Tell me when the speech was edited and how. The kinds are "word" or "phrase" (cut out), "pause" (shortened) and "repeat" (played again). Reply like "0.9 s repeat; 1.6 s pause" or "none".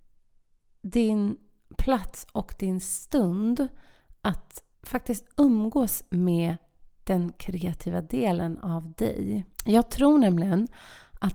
4.7 s pause; 9.5 s pause